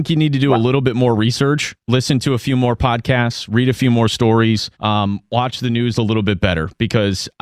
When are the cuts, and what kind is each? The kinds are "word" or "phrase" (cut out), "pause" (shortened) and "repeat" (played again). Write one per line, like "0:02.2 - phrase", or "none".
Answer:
0:01.8 - pause
0:04.7 - pause